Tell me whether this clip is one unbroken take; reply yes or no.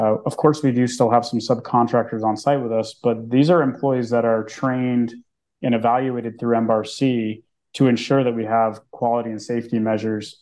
yes